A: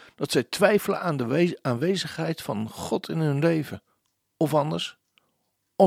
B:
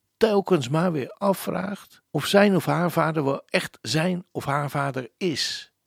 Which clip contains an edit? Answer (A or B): B